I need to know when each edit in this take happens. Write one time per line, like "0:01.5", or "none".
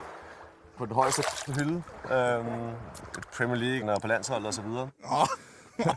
0:01.5
0:03.8